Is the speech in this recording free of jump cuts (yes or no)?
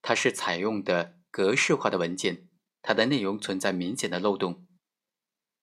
yes